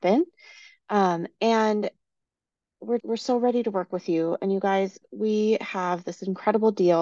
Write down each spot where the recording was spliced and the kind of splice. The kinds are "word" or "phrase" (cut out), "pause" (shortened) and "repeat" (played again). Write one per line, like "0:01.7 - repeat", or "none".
0:03.0 - word